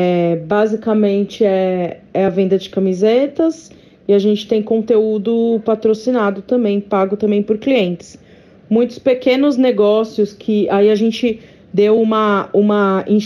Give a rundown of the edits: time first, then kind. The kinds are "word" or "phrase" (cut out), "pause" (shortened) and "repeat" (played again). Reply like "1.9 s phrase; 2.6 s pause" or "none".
none